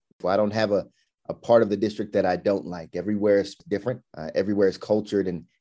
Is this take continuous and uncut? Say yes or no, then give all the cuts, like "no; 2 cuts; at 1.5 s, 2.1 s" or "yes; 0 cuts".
no; 1 cut; at 4.1 s